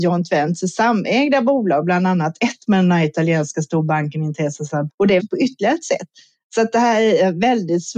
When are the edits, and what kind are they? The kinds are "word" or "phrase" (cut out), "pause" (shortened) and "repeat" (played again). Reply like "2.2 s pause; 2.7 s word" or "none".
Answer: 4.9 s word; 5.2 s word